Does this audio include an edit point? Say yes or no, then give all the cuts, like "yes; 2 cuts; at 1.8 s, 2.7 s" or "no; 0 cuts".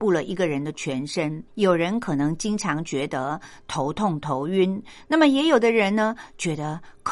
yes; 1 cut; at 1.5 s